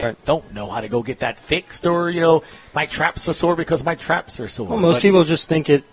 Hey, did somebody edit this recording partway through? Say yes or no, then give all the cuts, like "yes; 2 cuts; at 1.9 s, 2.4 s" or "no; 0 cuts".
no; 0 cuts